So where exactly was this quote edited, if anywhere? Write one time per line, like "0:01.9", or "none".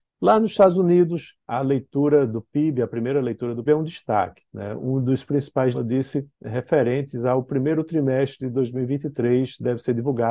0:01.4
0:03.7
0:04.5
0:05.7
0:06.3

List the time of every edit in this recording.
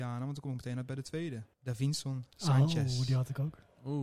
0:01.5

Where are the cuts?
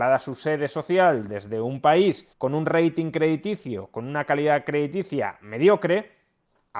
0:02.3

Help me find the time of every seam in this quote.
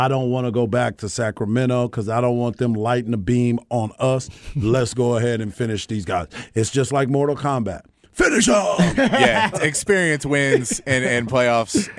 0:09.5

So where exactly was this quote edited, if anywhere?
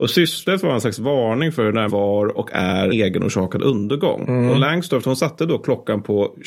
0:01.9
0:02.9

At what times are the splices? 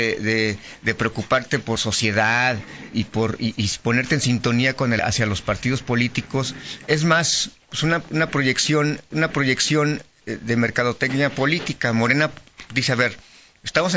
0:01.8
0:02.9
0:05.0
0:09.1

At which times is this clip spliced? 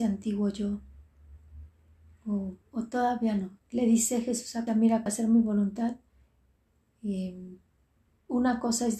0:02.6
0:03.6
0:04.7
0:05.1

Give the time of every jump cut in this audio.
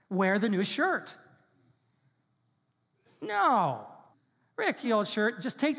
0:04.1
0:04.8

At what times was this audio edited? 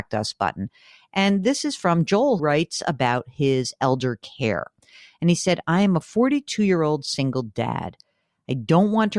0:02.4

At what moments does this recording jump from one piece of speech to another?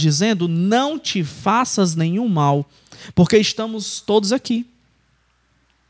none

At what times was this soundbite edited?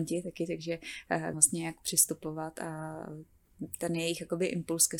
0:01.3

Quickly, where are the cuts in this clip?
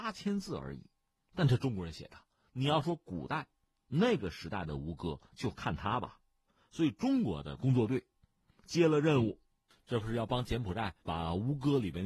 0:05.3
0:11.0

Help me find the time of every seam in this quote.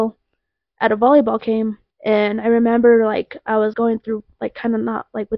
0:01.9
0:03.7

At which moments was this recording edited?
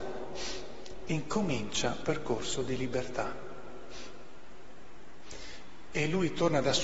0:02.0

